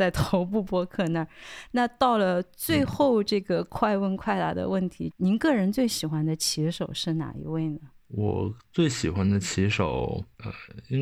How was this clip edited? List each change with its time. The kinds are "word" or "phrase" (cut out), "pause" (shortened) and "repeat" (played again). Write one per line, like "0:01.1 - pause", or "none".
0:05.1 - phrase